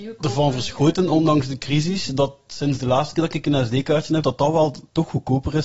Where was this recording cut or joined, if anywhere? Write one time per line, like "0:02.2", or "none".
0:04.2